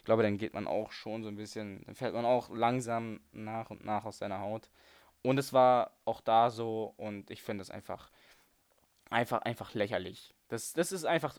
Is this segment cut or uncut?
uncut